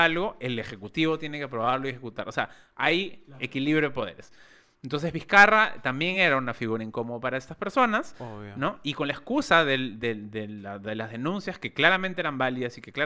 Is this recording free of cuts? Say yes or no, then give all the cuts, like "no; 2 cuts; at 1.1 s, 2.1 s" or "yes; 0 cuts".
yes; 0 cuts